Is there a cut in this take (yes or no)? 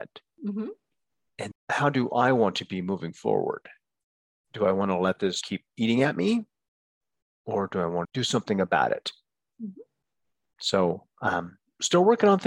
yes